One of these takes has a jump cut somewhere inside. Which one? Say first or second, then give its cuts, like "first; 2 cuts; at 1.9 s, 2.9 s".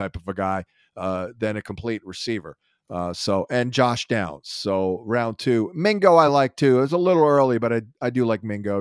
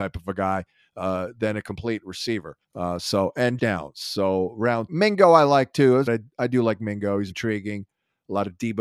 second; 5 cuts; at 2.6 s, 3.6 s, 4.9 s, 6.1 s, 7.3 s